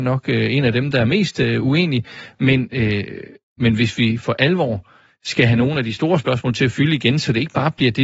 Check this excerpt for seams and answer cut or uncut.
uncut